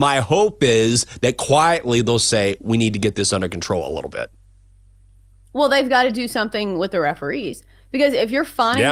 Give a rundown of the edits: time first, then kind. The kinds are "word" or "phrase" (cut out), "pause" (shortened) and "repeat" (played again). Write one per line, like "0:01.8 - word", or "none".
none

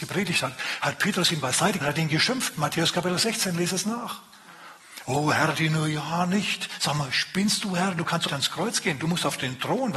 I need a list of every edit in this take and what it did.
0:01.8 - word
0:05.5 - phrase
0:08.3 - word

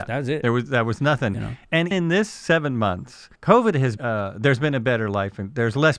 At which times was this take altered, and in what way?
0:01.9 - word
0:03.4 - pause
0:04.0 - word

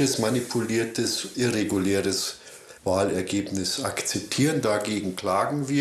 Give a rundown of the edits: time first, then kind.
0:01.3 - word
0:02.8 - pause

